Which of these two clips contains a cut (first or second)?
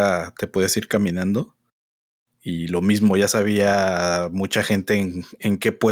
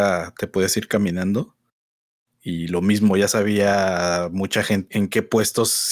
second